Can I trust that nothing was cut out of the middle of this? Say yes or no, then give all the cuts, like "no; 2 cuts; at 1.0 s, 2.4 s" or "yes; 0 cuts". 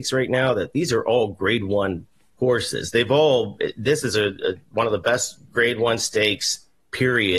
yes; 0 cuts